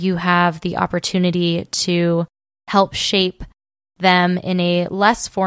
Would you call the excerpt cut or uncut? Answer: uncut